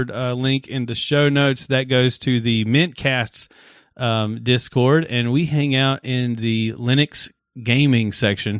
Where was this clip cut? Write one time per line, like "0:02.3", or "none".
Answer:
none